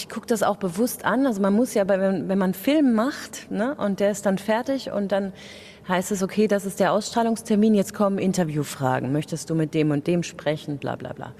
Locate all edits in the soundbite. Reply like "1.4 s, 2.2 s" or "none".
none